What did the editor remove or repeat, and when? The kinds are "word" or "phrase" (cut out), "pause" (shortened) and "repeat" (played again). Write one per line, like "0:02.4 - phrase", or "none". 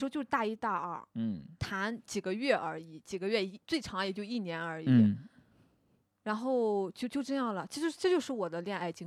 none